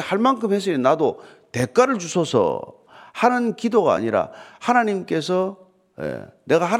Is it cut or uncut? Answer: uncut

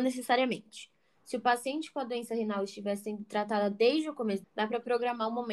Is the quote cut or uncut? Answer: cut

